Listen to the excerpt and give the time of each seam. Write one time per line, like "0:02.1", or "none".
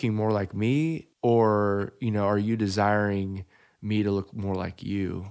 0:01.1